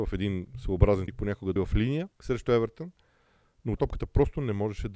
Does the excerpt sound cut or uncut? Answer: cut